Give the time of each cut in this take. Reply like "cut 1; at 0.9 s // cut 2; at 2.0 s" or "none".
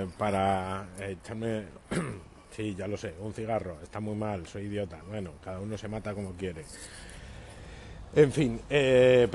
cut 1; at 5.0 s